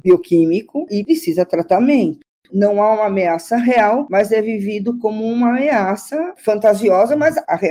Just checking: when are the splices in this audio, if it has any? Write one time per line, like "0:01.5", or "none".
none